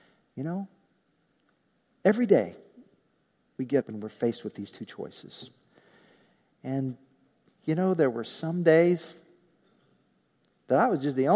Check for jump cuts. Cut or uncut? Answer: cut